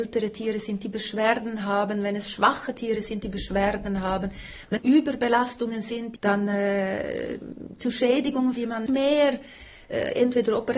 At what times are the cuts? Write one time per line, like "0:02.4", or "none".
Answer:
0:04.8
0:06.2
0:08.6
0:08.9